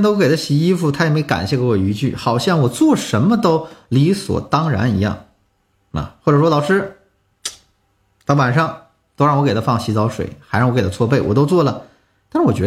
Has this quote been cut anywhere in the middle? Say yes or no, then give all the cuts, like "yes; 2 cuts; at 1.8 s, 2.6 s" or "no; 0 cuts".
no; 0 cuts